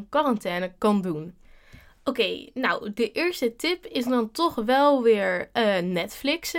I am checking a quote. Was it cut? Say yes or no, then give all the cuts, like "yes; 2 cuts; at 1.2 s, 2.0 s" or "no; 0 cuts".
no; 0 cuts